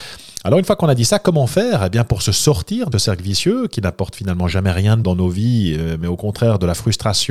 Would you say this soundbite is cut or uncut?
cut